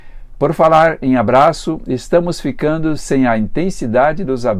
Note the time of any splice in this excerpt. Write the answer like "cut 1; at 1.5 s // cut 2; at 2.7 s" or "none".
none